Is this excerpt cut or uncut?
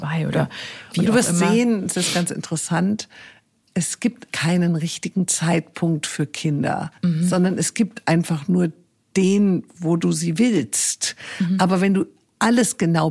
cut